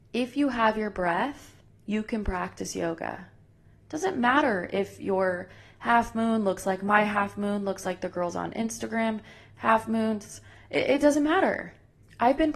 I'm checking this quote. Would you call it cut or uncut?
uncut